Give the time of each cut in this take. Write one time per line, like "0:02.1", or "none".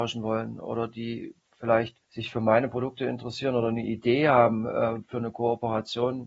0:02.0